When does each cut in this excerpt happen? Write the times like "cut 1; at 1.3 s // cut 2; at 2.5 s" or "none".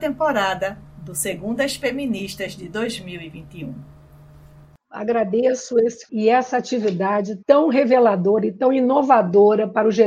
cut 1; at 6.1 s // cut 2; at 7.4 s